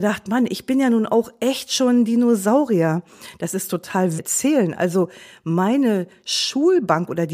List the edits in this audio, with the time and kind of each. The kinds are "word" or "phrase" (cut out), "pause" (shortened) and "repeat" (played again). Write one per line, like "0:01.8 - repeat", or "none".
0:04.2 - phrase